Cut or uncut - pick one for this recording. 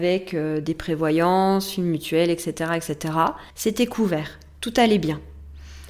cut